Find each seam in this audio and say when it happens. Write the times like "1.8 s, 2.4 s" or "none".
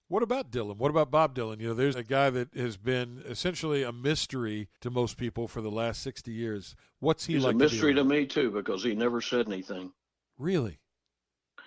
1.9 s, 3.2 s, 4.8 s